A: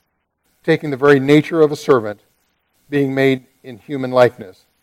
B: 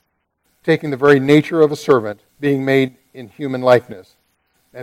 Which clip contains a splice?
B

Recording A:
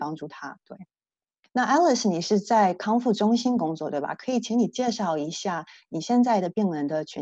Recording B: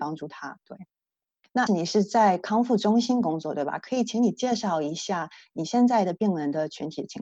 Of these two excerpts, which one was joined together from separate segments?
B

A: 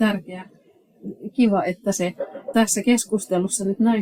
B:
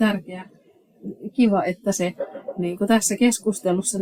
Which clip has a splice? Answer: A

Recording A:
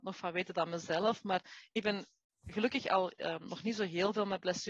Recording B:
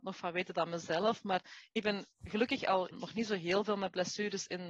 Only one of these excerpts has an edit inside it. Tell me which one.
B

